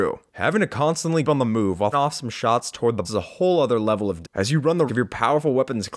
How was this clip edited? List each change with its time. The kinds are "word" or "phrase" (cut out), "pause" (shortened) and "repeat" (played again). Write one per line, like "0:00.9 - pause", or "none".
0:01.2 - word
0:01.9 - word
0:03.0 - word
0:04.2 - word
0:04.9 - word